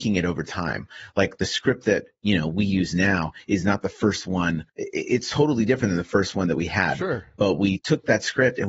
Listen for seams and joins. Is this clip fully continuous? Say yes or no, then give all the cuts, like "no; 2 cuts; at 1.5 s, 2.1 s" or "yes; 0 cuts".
no; 1 cut; at 4.7 s